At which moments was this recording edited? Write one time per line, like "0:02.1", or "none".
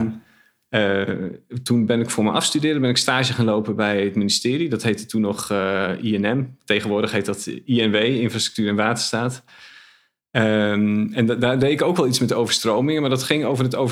none